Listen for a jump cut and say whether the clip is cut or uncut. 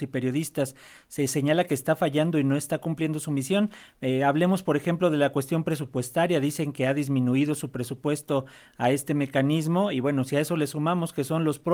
uncut